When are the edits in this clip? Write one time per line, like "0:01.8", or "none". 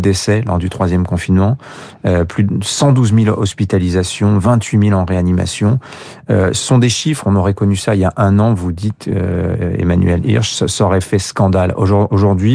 none